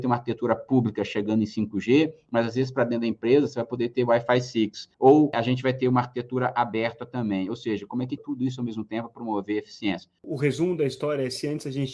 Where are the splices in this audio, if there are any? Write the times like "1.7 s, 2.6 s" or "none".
4.9 s, 8.2 s